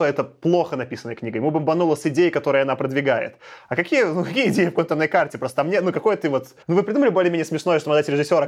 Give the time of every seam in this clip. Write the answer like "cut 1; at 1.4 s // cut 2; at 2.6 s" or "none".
cut 1; at 6.6 s